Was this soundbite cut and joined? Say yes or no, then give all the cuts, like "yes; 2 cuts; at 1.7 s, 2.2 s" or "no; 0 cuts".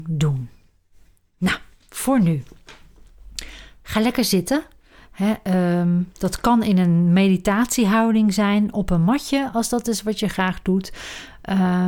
no; 0 cuts